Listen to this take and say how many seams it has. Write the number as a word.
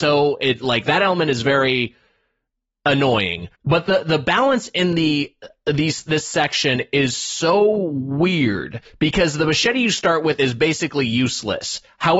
one